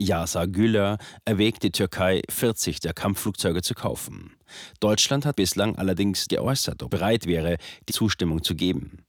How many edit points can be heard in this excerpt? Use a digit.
4